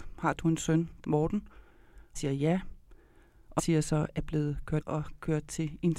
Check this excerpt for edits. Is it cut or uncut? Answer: cut